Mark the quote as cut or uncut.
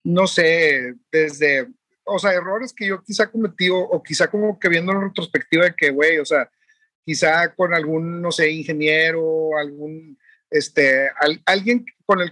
uncut